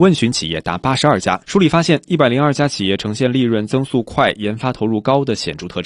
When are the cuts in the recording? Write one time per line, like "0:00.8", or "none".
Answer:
0:01.4